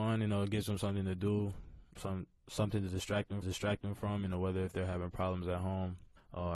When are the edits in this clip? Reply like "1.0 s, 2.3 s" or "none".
1.9 s, 3.4 s